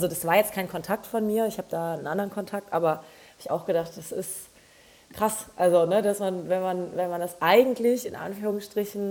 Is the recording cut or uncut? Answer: uncut